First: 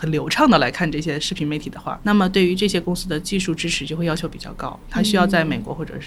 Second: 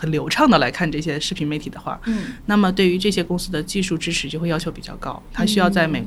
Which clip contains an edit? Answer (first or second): first